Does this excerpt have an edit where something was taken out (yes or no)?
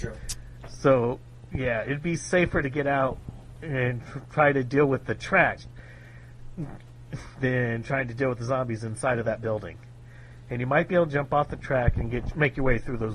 yes